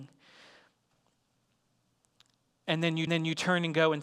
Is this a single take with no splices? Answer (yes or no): no